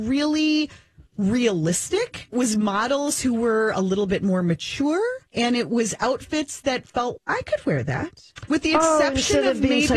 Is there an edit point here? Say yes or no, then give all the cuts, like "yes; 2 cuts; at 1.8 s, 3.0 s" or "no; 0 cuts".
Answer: yes; 4 cuts; at 1.1 s, 2.3 s, 5.3 s, 7.2 s